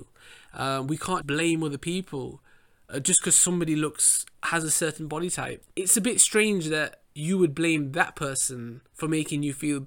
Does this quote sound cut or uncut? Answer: cut